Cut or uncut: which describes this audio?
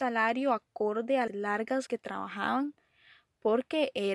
cut